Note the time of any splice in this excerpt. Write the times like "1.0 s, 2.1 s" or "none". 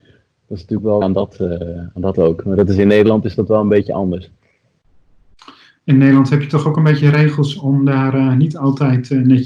1.0 s, 2.1 s